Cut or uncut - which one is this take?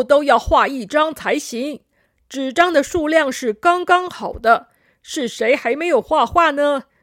uncut